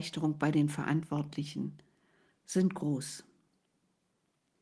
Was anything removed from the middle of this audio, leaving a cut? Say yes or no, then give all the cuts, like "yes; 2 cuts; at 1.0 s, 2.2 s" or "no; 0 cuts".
no; 0 cuts